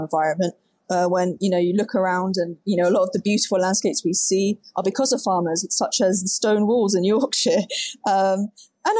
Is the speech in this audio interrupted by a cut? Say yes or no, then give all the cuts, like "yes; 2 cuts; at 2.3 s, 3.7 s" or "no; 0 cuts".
no; 0 cuts